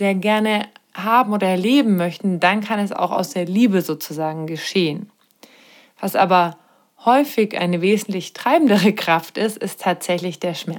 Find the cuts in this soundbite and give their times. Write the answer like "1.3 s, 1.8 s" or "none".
none